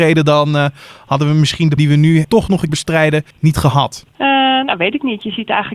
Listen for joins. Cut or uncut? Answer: cut